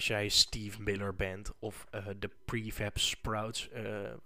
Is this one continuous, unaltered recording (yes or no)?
yes